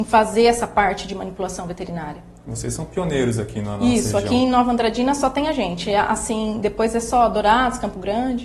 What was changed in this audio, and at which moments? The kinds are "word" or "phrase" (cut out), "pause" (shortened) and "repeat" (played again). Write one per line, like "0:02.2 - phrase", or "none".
none